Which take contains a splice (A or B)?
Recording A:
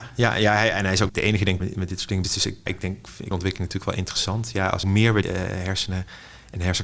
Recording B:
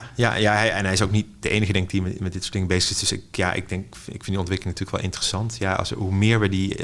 A